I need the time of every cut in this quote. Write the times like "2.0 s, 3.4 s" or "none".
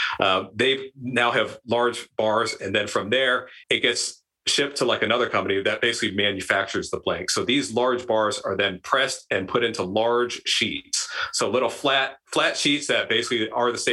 3.6 s, 12.2 s